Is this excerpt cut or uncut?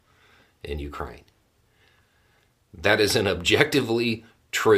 uncut